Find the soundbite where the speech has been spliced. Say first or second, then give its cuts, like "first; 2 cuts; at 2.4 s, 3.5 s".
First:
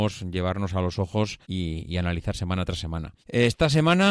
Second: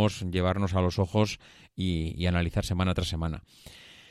first; 2 cuts; at 1.4 s, 3.2 s